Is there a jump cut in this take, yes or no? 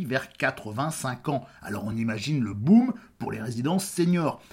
no